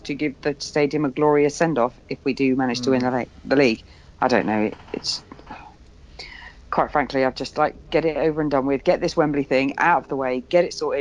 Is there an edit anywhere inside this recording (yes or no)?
no